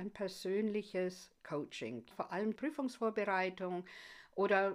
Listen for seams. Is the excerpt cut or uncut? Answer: cut